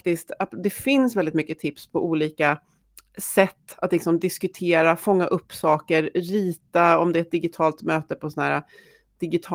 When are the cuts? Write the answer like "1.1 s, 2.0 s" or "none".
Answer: none